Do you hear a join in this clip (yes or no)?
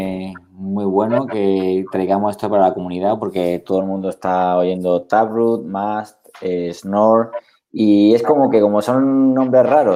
no